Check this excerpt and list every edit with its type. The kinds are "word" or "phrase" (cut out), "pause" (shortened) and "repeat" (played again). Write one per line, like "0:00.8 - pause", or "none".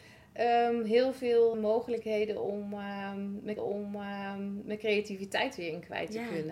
0:01.5 - word
0:03.6 - repeat